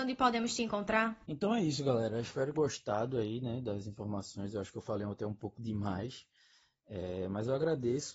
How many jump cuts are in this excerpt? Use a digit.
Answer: 2